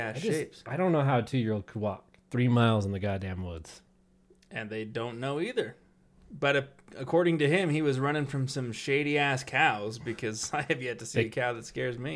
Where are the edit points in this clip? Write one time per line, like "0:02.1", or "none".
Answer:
none